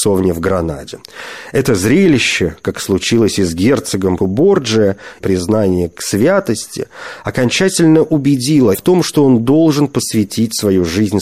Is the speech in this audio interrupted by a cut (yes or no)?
yes